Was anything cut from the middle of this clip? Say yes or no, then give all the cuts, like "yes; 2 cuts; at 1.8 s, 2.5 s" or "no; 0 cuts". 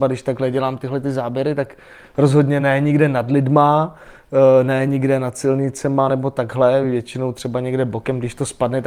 no; 0 cuts